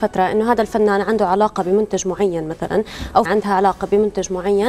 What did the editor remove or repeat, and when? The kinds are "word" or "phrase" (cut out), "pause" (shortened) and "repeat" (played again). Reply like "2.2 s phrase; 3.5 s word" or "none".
3.3 s word